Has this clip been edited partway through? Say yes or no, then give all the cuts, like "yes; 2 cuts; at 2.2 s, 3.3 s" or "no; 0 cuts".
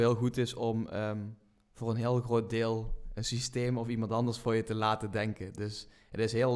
no; 0 cuts